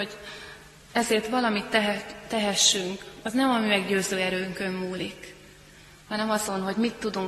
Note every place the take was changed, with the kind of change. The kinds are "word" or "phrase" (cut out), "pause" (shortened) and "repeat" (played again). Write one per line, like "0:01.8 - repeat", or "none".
0:03.2 - word